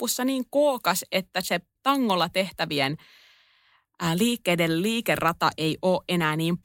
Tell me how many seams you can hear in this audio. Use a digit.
0